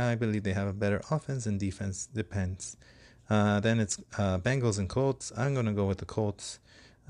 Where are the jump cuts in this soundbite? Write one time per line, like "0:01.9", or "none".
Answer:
none